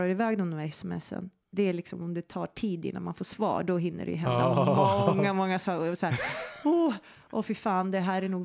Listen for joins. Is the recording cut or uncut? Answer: uncut